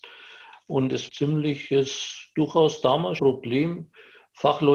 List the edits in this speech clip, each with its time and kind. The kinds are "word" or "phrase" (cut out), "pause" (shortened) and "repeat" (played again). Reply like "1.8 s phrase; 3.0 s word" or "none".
1.1 s phrase; 3.2 s word